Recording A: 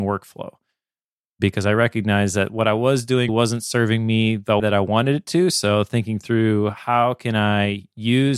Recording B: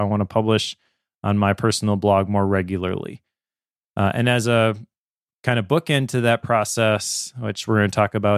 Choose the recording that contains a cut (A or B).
A